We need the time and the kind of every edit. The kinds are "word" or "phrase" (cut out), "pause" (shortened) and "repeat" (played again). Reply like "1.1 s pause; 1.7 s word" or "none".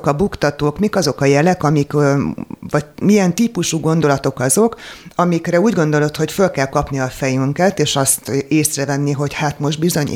none